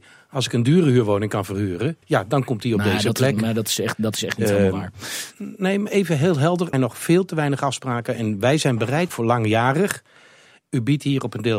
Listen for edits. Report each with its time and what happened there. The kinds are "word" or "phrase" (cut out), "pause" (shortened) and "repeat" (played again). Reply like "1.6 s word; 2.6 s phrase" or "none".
2.0 s pause; 6.7 s phrase; 9.1 s phrase